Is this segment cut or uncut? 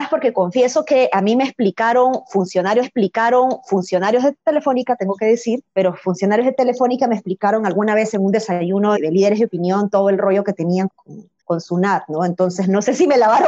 cut